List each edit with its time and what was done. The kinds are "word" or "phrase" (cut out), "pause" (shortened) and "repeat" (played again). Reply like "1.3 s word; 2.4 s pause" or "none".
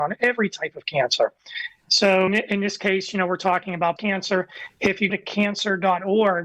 2.3 s word; 4.0 s word; 5.1 s word